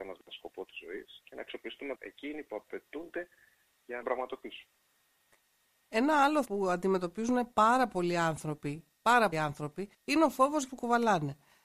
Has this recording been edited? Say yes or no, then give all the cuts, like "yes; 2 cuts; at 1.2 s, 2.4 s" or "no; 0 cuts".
yes; 7 cuts; at 1.2 s, 2.0 s, 4.0 s, 6.4 s, 9.3 s, 9.9 s, 10.7 s